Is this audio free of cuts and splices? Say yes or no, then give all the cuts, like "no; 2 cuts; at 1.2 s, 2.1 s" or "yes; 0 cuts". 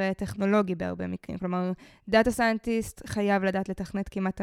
yes; 0 cuts